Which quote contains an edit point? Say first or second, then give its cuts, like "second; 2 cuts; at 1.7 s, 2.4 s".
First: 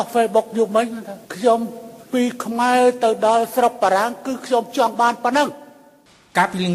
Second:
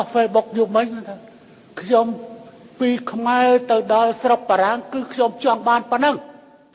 first; 2 cuts; at 1.2 s, 2.1 s